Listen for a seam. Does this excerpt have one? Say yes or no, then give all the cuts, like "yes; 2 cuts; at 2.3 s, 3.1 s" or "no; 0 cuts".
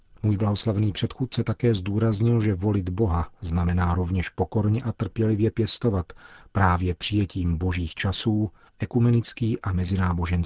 no; 0 cuts